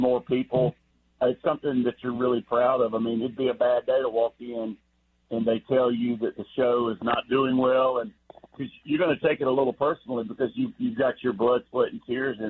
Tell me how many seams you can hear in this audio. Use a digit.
0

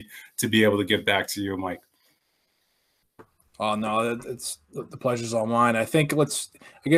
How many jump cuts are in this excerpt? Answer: 0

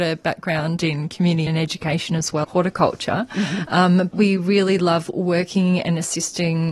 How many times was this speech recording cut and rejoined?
3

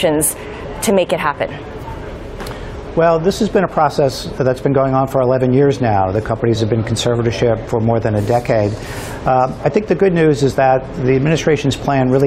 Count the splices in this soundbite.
0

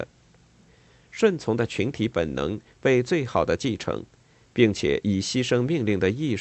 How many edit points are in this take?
0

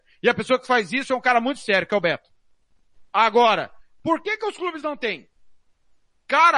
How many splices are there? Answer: 0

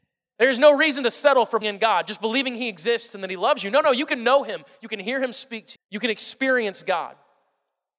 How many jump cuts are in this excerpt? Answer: 2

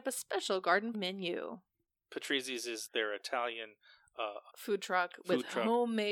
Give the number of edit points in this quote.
3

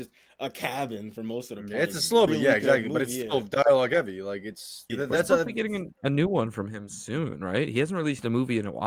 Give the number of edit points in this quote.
2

